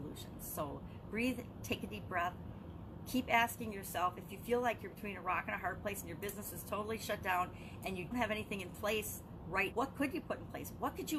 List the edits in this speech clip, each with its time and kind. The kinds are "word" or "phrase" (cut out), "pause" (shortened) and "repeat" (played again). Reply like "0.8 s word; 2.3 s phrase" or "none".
8.1 s word; 9.7 s word